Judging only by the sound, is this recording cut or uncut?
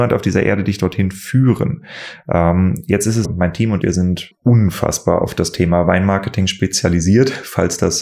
cut